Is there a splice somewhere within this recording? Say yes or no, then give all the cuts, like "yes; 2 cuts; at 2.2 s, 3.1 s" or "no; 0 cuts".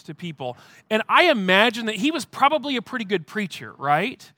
no; 0 cuts